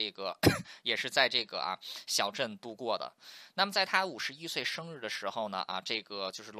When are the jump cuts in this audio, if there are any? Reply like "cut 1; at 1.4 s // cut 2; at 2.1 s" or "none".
none